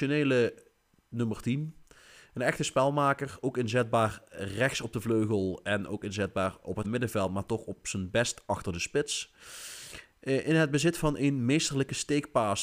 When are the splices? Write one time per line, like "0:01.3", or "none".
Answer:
0:06.8